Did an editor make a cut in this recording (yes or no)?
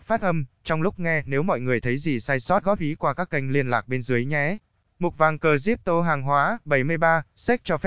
yes